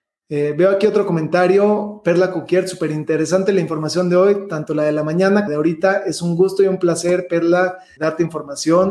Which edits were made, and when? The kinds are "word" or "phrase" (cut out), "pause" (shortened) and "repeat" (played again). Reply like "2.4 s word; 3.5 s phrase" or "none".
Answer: 5.5 s phrase; 8.0 s word